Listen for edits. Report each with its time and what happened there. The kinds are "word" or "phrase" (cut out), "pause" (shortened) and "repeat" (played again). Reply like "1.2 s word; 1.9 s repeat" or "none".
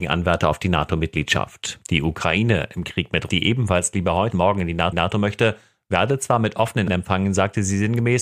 1.8 s pause; 3.3 s word; 4.3 s word; 4.9 s repeat; 6.9 s word